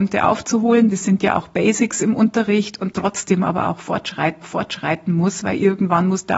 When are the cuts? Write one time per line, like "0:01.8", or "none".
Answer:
0:00.9
0:02.9
0:04.4